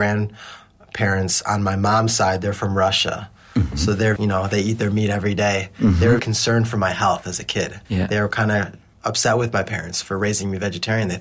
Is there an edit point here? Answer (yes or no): yes